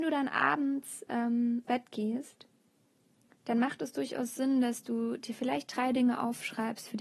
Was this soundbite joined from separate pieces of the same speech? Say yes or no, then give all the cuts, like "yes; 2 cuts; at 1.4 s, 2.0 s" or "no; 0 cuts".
yes; 1 cut; at 1.6 s